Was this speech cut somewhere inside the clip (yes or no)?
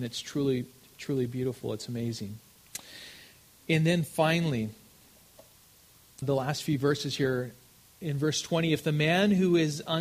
yes